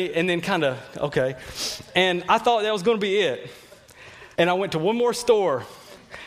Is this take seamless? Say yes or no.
no